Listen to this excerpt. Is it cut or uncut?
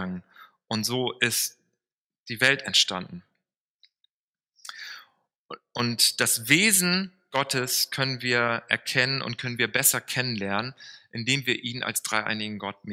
uncut